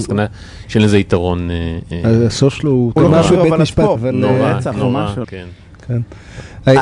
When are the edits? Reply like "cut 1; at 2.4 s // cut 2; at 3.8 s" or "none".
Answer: cut 1; at 3.0 s // cut 2; at 4.0 s // cut 3; at 5.2 s